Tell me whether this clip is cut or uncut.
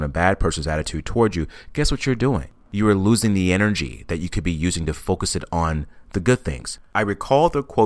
uncut